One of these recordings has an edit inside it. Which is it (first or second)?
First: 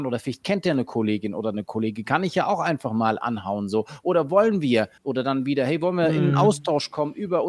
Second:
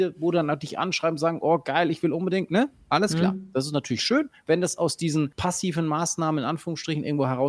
first